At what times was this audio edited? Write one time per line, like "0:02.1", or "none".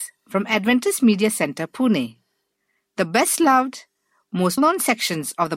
0:04.6